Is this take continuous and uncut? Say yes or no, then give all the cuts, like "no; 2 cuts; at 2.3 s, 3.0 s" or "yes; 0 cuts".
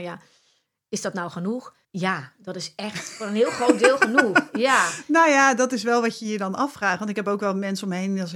no; 1 cut; at 1.8 s